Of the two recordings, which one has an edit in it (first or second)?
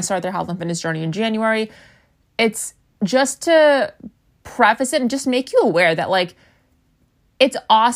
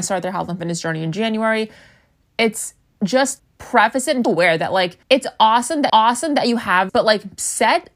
second